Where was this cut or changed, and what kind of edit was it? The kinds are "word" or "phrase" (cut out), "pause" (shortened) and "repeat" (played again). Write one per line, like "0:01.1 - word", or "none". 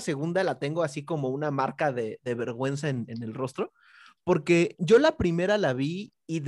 none